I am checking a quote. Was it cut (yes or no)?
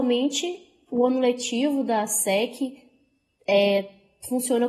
no